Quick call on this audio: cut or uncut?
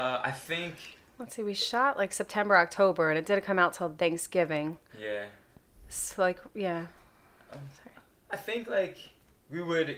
uncut